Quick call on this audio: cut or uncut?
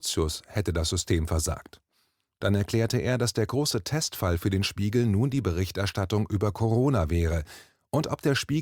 uncut